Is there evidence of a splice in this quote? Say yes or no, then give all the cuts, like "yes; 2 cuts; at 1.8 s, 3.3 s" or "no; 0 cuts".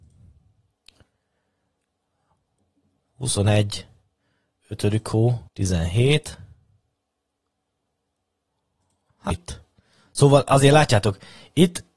yes; 2 cuts; at 5.5 s, 9.3 s